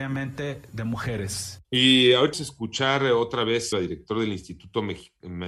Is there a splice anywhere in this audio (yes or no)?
yes